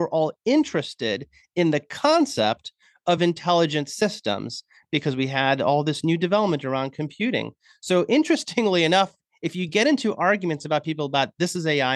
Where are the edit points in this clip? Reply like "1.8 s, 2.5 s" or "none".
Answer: none